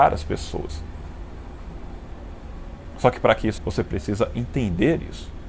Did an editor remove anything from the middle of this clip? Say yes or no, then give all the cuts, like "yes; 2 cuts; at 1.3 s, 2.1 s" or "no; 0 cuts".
yes; 1 cut; at 3.6 s